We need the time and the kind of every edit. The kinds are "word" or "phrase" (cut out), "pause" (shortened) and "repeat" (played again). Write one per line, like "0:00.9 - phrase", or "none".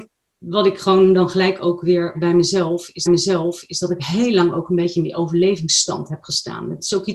0:02.1 - word
0:03.1 - repeat